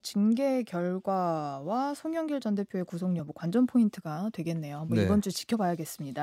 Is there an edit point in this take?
no; 0 cuts

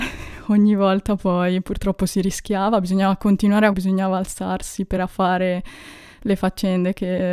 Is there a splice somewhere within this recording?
yes; 2 cuts; at 3.7 s, 5.0 s

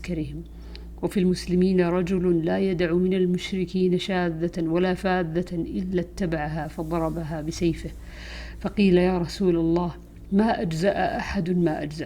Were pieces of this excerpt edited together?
no; 0 cuts

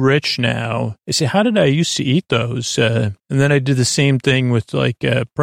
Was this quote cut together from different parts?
yes; 2 cuts; at 1.0 s, 3.2 s

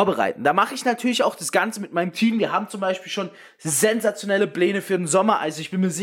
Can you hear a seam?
no; 0 cuts

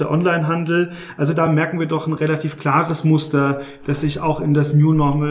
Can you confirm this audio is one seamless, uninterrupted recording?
yes; 0 cuts

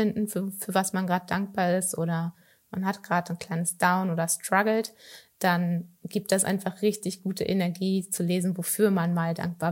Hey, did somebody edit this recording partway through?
no; 0 cuts

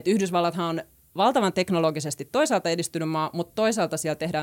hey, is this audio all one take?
yes; 0 cuts

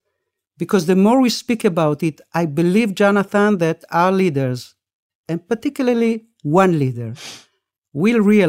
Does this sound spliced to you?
no; 0 cuts

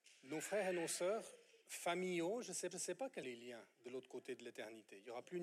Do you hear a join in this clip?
yes; 4 cuts; at 1.6 s, 2.7 s, 3.2 s, 3.7 s

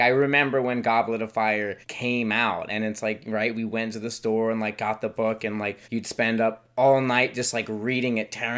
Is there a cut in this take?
yes; 2 cuts; at 1.8 s, 5.8 s

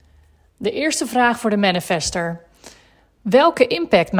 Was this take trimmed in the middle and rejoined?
no; 0 cuts

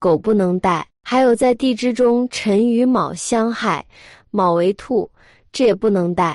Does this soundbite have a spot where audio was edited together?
no; 0 cuts

